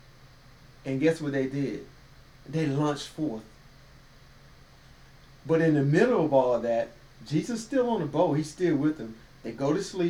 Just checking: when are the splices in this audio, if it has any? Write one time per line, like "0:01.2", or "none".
none